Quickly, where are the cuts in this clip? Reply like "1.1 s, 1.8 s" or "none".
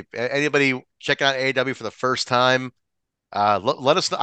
0.9 s